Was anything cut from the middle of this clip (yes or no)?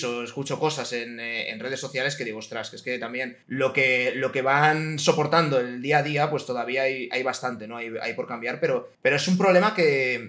yes